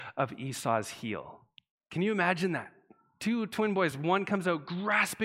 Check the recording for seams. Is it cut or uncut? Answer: uncut